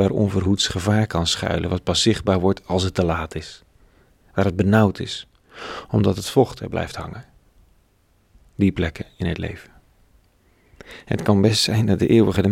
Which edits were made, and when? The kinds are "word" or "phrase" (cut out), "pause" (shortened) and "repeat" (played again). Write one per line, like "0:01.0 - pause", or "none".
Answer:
none